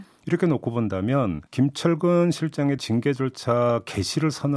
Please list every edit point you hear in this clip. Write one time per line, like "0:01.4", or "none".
0:01.5
0:02.8